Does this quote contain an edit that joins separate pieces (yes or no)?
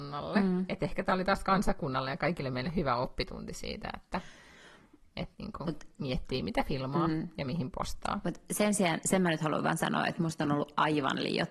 no